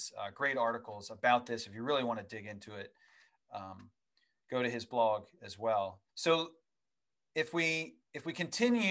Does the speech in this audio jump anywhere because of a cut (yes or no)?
yes